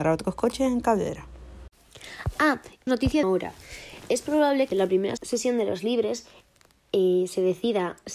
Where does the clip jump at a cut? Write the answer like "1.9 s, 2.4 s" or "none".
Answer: 2.9 s, 3.2 s, 4.7 s, 5.2 s